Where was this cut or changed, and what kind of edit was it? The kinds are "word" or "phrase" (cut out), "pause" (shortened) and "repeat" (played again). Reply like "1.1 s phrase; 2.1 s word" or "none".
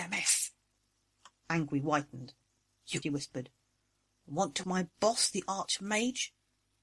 3.0 s phrase; 4.6 s word